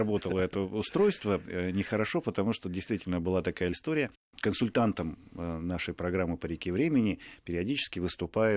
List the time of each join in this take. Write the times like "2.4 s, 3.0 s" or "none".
3.7 s